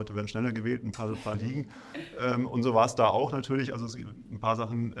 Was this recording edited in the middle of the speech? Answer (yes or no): yes